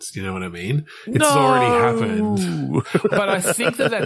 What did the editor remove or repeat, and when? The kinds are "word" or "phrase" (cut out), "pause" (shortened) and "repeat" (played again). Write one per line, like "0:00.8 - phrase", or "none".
0:03.1 - word